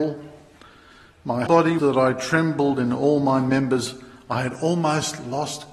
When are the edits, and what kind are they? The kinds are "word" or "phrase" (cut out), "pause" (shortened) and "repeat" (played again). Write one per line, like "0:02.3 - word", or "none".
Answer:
0:01.5 - word
0:01.8 - phrase